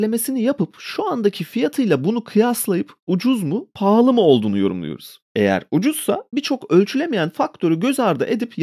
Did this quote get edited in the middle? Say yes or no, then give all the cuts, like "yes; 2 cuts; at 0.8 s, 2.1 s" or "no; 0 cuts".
yes; 2 cuts; at 5.2 s, 6.3 s